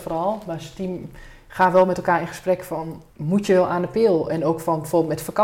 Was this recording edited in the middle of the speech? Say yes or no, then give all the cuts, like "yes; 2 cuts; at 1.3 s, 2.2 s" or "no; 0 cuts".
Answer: yes; 1 cut; at 3.1 s